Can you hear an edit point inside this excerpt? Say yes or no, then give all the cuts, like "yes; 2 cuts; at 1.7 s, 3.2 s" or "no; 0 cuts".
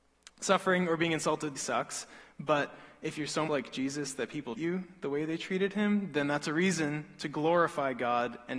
yes; 3 cuts; at 1.6 s, 3.5 s, 4.6 s